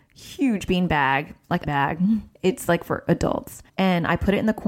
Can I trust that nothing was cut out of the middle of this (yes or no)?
no